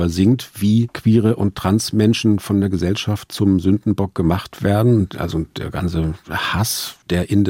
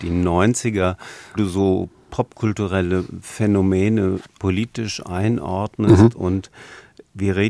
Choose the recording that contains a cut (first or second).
second